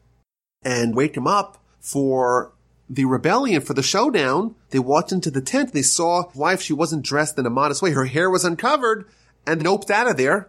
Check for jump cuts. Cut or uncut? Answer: cut